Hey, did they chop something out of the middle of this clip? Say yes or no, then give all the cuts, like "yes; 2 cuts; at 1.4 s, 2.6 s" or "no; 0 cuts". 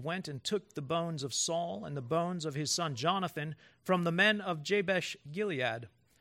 no; 0 cuts